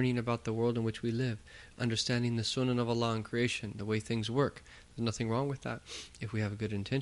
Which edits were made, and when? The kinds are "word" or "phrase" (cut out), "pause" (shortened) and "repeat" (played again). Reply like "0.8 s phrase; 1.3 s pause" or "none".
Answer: none